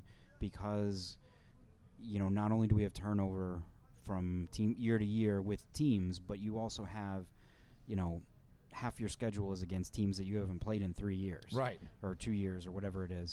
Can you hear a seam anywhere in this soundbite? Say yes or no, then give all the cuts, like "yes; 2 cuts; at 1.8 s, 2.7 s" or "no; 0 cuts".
no; 0 cuts